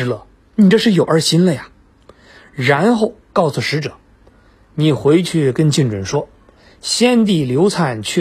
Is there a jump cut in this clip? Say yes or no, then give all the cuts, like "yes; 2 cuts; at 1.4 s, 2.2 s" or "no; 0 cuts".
no; 0 cuts